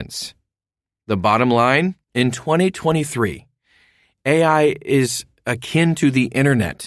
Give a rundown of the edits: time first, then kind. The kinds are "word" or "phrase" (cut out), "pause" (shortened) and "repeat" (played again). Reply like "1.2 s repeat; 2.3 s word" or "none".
2.0 s pause